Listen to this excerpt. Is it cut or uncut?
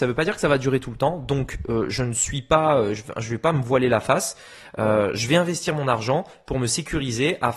uncut